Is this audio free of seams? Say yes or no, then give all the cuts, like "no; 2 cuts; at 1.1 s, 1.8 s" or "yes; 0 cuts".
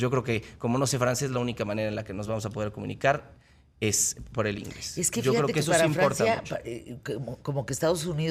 yes; 0 cuts